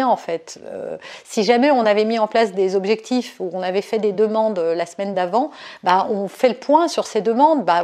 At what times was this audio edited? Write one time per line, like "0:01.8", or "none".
none